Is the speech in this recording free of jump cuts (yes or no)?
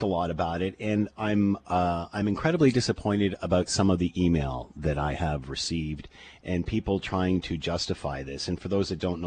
yes